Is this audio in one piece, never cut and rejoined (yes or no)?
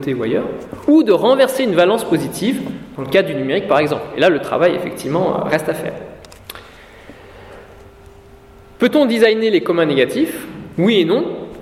yes